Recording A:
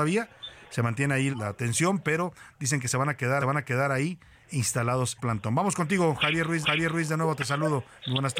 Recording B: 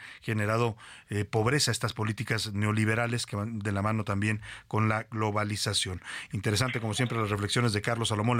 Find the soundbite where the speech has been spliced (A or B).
A